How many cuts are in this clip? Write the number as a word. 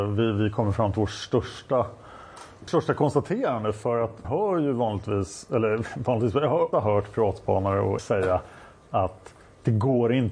four